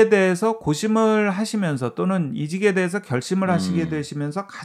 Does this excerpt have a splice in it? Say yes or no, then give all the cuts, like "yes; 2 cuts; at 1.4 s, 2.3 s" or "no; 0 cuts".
no; 0 cuts